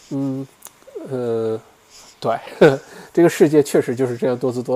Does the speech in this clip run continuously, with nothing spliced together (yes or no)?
yes